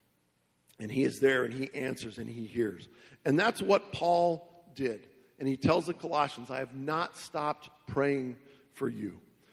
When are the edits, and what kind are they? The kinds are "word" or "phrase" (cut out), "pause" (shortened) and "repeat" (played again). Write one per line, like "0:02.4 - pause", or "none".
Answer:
none